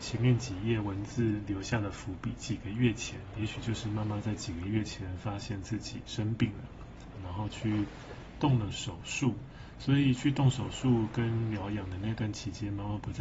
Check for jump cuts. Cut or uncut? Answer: cut